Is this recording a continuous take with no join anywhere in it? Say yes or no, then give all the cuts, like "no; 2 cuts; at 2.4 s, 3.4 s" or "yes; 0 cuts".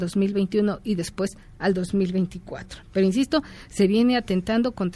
yes; 0 cuts